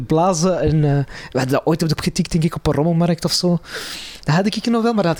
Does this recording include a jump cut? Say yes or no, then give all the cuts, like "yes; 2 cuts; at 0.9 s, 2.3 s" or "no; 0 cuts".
yes; 1 cut; at 2.0 s